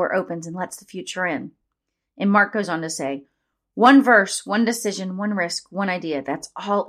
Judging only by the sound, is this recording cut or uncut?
uncut